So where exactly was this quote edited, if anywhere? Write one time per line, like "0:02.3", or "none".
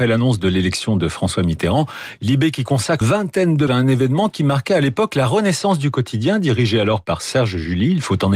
0:03.0
0:03.7